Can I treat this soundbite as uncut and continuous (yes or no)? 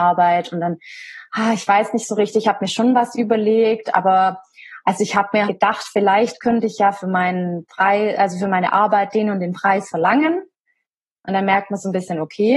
no